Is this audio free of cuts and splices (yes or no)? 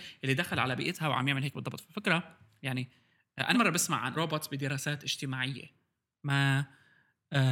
no